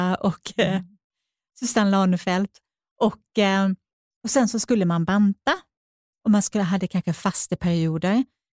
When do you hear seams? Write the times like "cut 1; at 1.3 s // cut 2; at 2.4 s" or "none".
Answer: none